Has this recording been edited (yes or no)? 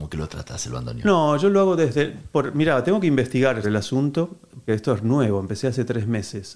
yes